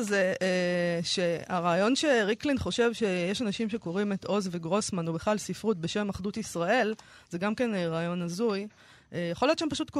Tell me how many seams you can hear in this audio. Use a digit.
0